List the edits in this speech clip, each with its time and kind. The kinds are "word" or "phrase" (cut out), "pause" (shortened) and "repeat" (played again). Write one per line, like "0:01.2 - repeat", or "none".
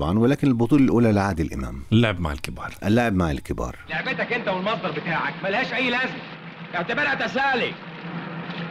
none